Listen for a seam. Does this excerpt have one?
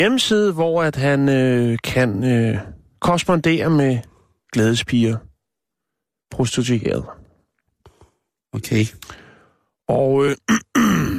no; 0 cuts

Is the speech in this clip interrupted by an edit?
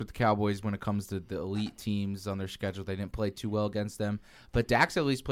no; 0 cuts

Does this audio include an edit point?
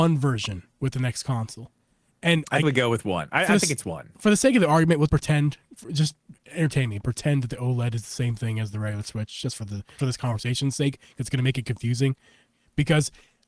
yes; 3 cuts; at 2.6 s, 5.1 s, 10.0 s

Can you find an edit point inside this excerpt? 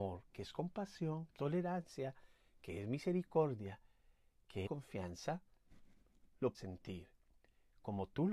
yes; 3 cuts; at 1.4 s, 4.7 s, 6.5 s

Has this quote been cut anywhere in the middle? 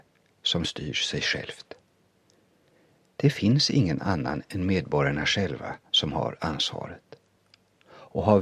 no; 0 cuts

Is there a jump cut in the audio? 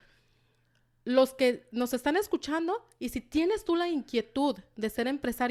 no; 0 cuts

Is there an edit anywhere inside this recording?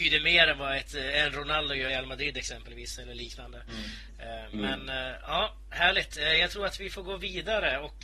yes; 1 cut; at 1.9 s

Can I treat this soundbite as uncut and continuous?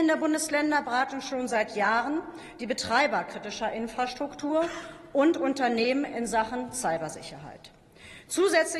yes; 0 cuts

